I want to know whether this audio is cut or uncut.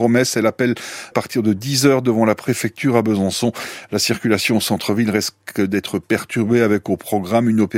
cut